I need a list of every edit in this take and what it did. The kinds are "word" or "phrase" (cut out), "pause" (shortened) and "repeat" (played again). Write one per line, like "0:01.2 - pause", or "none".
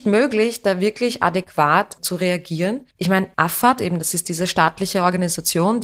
0:02.9 - pause
0:03.3 - pause